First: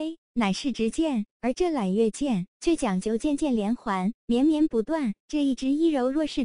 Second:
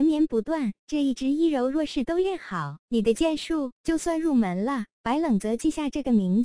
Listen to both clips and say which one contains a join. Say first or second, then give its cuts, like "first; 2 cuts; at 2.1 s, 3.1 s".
second; 1 cut; at 2.8 s